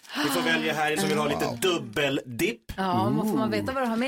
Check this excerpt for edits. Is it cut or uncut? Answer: cut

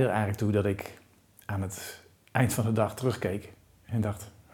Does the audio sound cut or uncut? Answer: uncut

